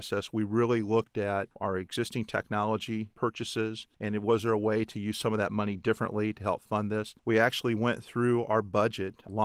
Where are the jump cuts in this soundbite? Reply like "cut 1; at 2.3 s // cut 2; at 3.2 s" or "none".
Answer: cut 1; at 3.9 s // cut 2; at 7.2 s